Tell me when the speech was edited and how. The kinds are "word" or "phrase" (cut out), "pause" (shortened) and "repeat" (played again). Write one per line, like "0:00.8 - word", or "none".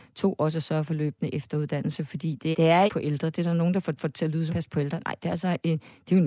0:02.5 - word
0:02.9 - phrase
0:04.0 - repeat
0:04.5 - phrase